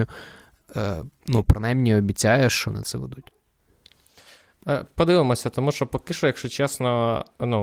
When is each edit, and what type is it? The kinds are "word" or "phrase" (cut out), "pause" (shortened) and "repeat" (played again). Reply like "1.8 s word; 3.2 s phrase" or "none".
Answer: 2.7 s phrase